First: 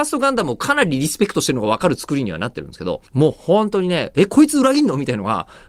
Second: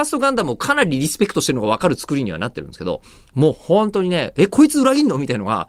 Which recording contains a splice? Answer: first; 1 cut; at 3.1 s

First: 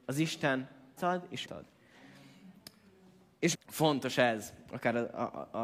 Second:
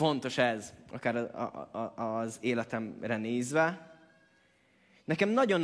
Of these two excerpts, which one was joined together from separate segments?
first; 3 cuts; at 1.0 s, 1.4 s, 3.5 s

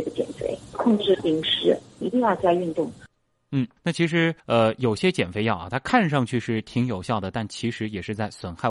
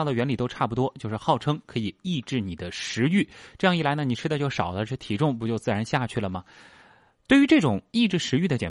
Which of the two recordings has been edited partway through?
first; 2 cuts; at 3.8 s, 4.4 s

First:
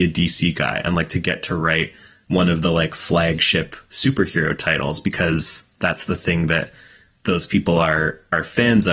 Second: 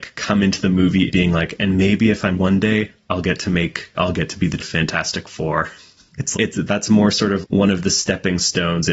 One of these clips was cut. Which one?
second; 8 cuts; at 1.1 s, 2.3 s, 3.9 s, 4.6 s, 6.3 s, 6.7 s, 7.1 s, 7.4 s

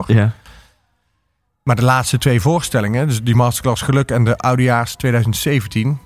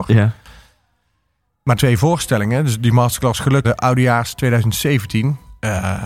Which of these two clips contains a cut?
second; 2 cuts; at 1.8 s, 3.6 s

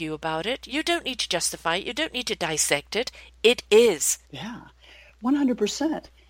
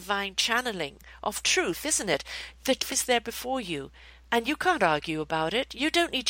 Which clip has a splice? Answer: first; 1 cut; at 4.2 s

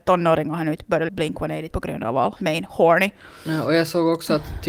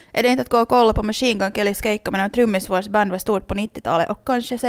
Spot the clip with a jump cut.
first; 3 cuts; at 1.1 s, 1.7 s, 2.4 s

